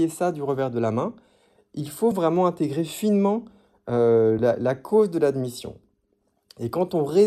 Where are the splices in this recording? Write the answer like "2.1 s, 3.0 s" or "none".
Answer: none